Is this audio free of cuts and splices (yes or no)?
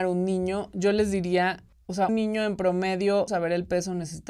no